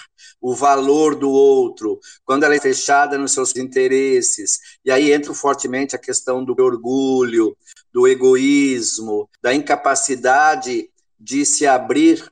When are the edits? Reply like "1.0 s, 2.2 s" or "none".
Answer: 2.6 s, 3.5 s, 5.3 s, 6.6 s